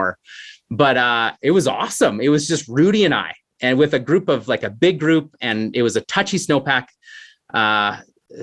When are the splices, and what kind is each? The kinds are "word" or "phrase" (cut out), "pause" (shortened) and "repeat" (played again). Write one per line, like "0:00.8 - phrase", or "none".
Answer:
none